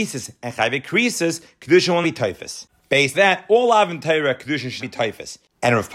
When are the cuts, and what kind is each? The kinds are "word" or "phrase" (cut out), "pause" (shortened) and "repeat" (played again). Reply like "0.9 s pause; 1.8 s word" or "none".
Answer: 2.0 s word; 3.1 s word; 4.8 s word